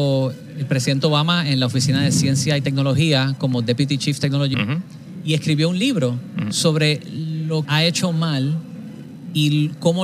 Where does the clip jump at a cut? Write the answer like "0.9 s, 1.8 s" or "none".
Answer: 4.5 s, 7.6 s